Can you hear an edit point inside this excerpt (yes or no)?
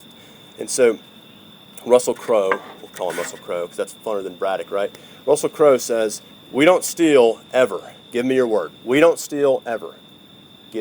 yes